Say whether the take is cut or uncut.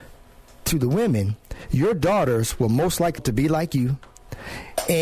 cut